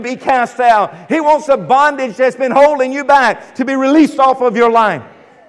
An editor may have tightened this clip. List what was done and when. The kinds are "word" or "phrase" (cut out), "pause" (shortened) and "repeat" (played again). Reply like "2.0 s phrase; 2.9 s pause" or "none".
none